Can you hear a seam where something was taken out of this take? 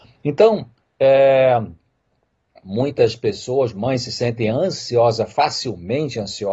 yes; 1 cut; at 3.7 s

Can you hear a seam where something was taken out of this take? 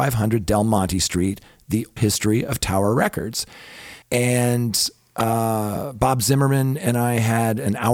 yes; 2 cuts; at 2.0 s, 4.0 s

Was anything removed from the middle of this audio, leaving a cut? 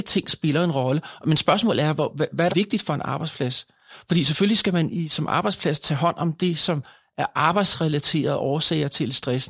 yes; 1 cut; at 2.5 s

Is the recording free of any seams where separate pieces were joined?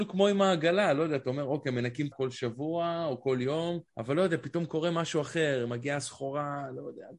no; 2 cuts; at 2.1 s, 3.9 s

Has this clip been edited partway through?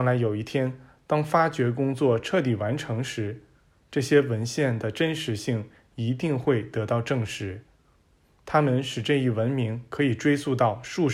no; 0 cuts

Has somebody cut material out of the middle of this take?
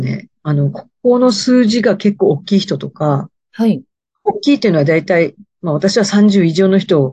no; 0 cuts

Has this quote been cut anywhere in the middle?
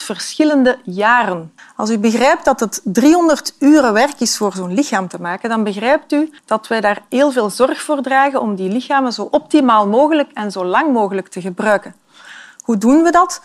yes; 2 cuts; at 1.6 s, 6.4 s

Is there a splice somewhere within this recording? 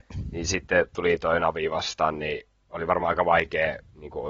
no; 0 cuts

